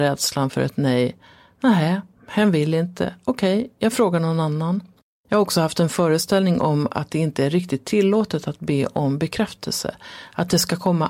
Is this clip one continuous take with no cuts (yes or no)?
yes